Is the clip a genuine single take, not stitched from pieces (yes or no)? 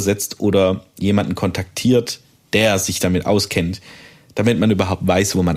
yes